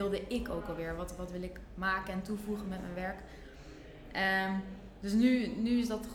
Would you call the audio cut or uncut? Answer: uncut